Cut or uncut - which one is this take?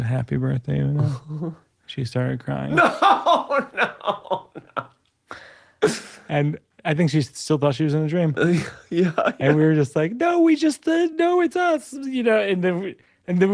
uncut